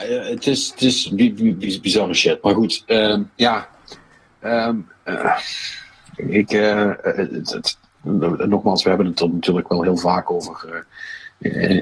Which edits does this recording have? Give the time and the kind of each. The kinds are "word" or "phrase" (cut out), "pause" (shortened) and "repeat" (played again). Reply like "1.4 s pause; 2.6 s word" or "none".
none